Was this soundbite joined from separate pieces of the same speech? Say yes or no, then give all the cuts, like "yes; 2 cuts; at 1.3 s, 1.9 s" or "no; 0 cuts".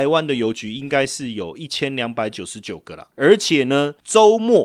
yes; 1 cut; at 3.1 s